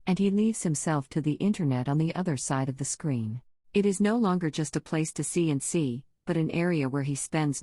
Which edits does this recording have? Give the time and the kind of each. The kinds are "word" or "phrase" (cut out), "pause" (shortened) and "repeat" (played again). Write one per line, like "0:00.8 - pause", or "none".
0:03.5 - pause